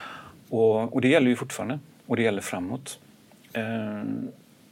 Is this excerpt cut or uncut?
uncut